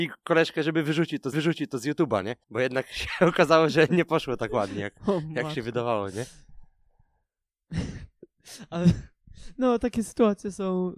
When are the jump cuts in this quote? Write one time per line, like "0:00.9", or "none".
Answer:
0:01.3
0:02.4

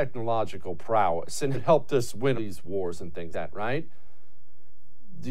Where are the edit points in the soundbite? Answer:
0:01.5
0:02.3
0:03.3

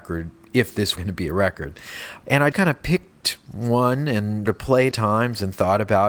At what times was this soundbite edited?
0:01.0
0:02.5
0:04.5
0:04.9

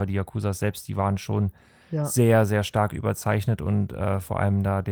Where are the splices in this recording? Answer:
none

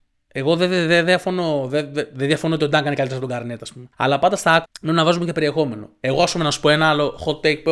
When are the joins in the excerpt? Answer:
0:03.9
0:04.6

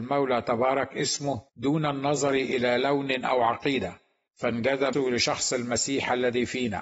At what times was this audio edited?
0:01.5
0:03.2
0:04.9

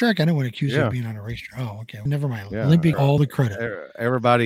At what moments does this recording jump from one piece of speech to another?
0:02.1
0:02.9

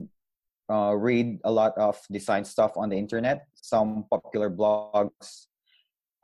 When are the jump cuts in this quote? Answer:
0:03.6

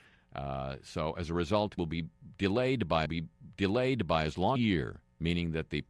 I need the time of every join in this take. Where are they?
0:01.8
0:03.1
0:04.6

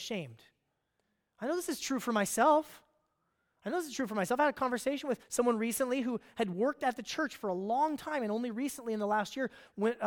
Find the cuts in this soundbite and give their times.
0:05.2

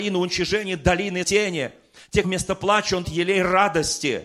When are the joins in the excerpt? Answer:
0:01.2
0:02.2
0:03.0

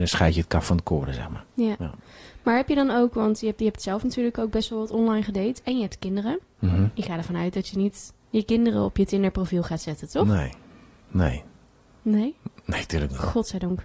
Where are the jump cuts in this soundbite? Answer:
none

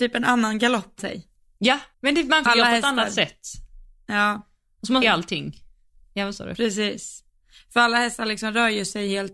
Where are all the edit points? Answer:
0:01.0
0:01.9
0:02.5
0:05.0

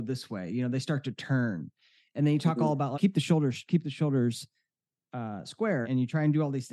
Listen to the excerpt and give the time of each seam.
0:02.9
0:05.8

